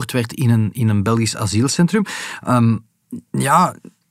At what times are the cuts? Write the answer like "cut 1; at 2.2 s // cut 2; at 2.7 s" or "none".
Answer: none